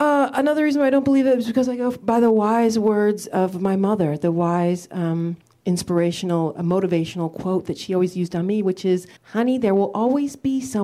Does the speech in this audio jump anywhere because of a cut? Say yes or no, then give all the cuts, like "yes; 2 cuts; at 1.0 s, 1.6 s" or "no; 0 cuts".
yes; 2 cuts; at 5.4 s, 9.2 s